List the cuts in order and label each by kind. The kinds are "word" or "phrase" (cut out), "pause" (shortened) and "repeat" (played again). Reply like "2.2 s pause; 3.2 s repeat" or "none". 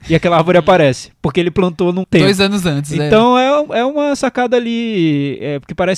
2.0 s word